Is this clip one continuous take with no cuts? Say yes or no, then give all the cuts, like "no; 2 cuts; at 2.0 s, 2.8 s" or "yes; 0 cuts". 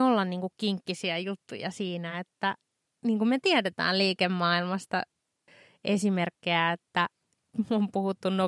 yes; 0 cuts